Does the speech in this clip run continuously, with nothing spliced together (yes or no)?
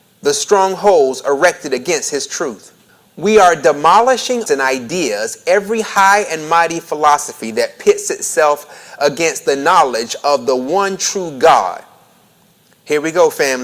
no